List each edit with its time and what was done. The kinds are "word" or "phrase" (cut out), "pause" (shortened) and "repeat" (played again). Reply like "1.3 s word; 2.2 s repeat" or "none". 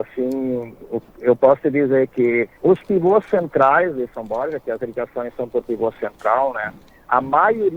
1.1 s pause; 2.5 s pause